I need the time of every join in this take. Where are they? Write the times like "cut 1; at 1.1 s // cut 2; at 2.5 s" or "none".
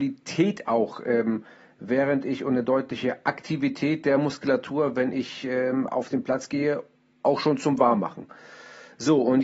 none